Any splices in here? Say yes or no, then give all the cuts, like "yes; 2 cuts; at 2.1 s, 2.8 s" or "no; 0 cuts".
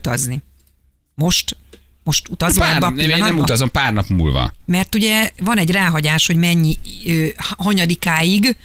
no; 0 cuts